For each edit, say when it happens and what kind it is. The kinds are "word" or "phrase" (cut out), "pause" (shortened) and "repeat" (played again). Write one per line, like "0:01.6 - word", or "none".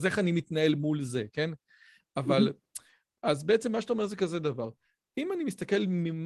none